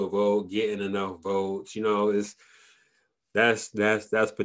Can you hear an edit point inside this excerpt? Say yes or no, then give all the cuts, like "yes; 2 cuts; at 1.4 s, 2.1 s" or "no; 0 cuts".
no; 0 cuts